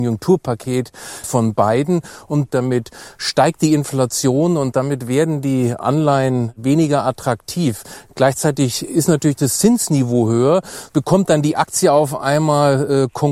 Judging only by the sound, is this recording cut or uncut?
cut